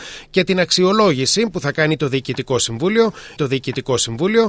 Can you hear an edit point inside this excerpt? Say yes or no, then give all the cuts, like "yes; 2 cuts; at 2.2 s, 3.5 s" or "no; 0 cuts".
yes; 1 cut; at 3.4 s